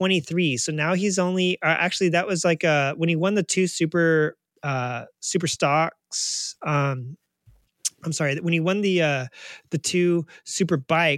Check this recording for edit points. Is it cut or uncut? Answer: uncut